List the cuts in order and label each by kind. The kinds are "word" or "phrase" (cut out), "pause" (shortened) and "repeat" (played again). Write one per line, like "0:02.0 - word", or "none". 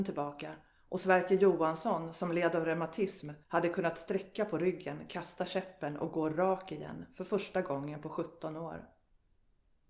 0:03.4 - pause